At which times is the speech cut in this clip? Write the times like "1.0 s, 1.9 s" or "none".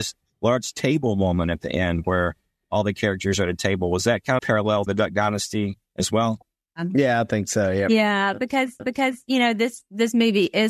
4.4 s, 4.9 s, 8.8 s